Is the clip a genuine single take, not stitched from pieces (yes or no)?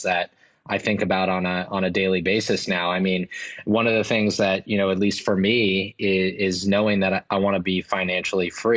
yes